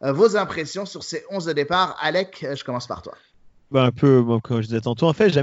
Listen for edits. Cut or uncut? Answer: uncut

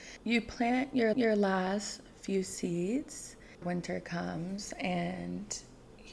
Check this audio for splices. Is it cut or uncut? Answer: cut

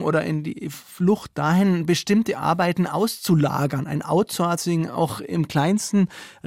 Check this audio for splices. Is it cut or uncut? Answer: uncut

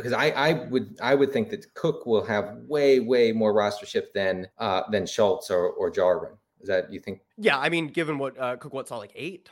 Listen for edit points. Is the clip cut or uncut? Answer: cut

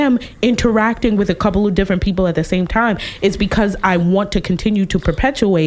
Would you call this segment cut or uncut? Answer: uncut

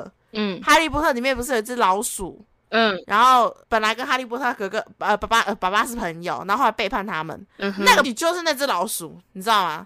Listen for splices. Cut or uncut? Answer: cut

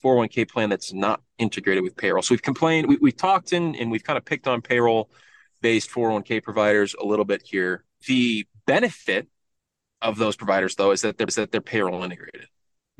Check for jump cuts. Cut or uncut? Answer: cut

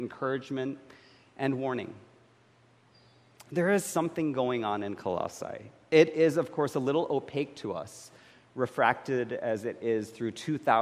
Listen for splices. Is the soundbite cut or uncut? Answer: uncut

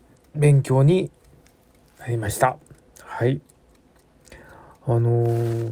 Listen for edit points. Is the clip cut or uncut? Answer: uncut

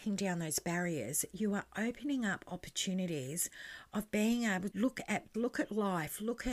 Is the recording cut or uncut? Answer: cut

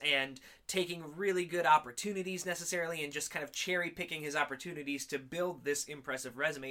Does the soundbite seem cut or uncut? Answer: uncut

